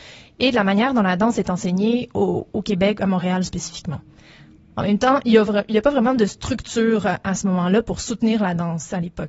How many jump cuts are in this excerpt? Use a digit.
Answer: 0